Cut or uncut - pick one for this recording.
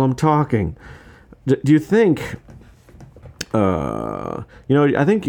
uncut